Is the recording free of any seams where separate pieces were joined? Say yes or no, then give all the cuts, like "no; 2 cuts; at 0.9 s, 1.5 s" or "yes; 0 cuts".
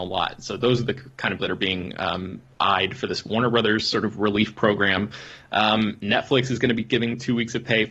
no; 1 cut; at 1.4 s